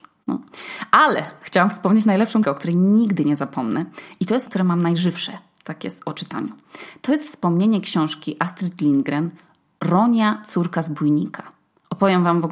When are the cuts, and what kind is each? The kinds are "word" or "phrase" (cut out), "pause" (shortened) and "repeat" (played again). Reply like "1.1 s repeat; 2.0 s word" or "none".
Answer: 2.4 s word; 4.5 s word